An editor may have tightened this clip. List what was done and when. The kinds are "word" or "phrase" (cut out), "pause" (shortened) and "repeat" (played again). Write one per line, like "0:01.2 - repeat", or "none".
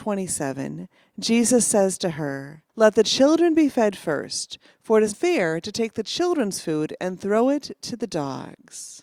0:02.7 - pause
0:05.1 - word